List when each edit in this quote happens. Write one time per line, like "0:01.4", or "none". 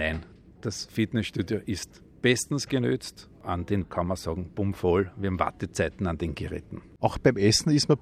0:03.8